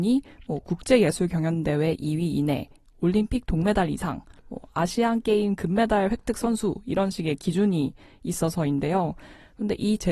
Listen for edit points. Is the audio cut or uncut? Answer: uncut